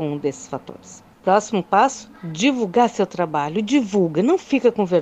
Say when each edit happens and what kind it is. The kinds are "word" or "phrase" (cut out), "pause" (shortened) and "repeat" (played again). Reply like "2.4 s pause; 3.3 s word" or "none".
1.1 s pause